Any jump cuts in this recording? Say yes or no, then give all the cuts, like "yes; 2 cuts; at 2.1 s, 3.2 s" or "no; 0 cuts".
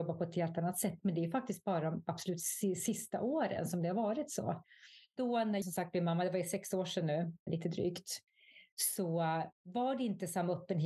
yes; 3 cuts; at 5.6 s, 7.5 s, 9.5 s